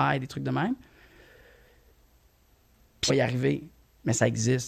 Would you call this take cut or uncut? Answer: cut